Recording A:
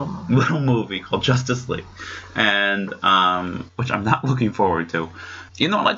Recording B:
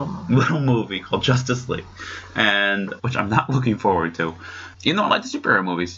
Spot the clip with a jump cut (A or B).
B